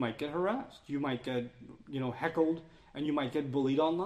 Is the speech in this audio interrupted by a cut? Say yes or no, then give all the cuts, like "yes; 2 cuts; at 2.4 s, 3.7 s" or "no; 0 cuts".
no; 0 cuts